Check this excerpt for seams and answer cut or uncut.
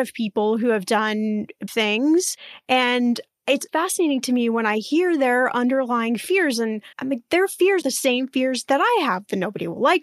cut